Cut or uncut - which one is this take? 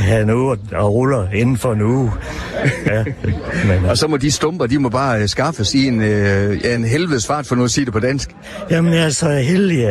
uncut